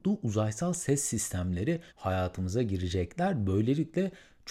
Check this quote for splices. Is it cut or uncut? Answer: cut